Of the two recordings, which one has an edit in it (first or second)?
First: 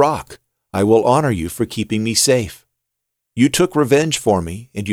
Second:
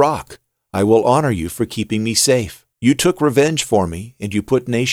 second